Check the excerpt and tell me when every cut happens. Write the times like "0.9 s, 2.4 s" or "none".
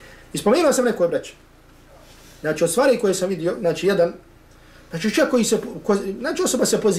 none